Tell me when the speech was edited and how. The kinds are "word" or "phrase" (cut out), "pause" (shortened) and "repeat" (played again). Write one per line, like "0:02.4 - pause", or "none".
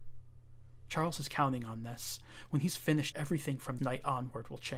0:03.1 - word
0:03.8 - word